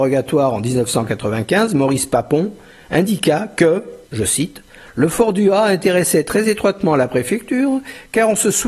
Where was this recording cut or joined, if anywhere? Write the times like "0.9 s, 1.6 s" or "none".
4.0 s